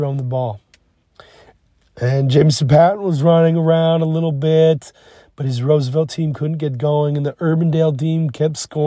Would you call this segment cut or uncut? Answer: uncut